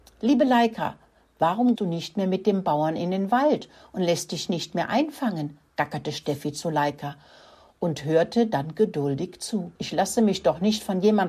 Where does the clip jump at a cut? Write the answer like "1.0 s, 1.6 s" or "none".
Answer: 1.8 s, 9.8 s

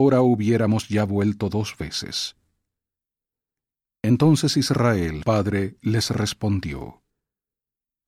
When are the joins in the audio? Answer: 5.2 s

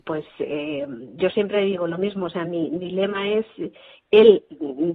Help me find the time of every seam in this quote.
none

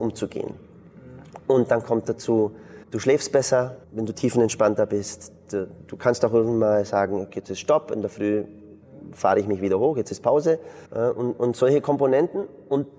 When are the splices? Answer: 2.8 s, 3.8 s, 10.9 s

